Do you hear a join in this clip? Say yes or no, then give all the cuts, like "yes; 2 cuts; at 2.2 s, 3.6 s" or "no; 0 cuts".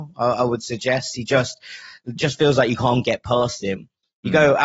no; 0 cuts